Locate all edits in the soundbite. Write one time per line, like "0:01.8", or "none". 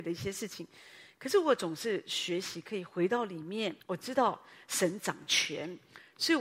0:03.8